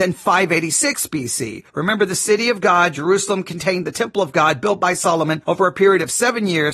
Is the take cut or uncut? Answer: cut